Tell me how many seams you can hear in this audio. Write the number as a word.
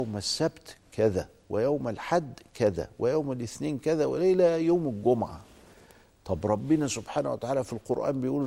zero